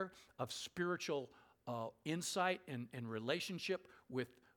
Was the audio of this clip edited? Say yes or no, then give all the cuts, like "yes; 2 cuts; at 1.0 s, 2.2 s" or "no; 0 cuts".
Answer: no; 0 cuts